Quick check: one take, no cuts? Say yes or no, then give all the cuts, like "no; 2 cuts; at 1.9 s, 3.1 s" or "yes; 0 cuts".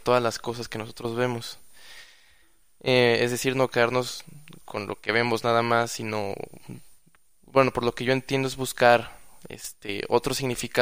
yes; 0 cuts